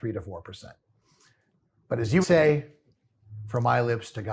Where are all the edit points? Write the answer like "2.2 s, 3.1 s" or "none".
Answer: 2.2 s

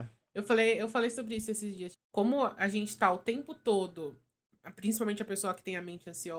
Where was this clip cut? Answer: 1.9 s

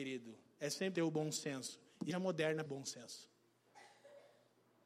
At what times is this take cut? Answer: 0.9 s, 2.1 s, 2.7 s

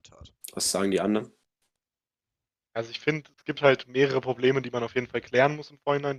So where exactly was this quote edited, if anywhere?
none

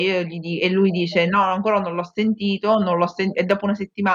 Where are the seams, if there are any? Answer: none

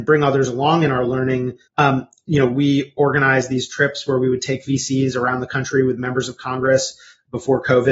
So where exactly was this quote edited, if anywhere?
1.7 s

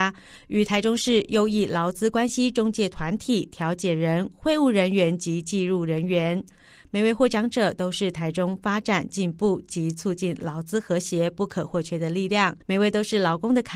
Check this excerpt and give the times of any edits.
12.6 s

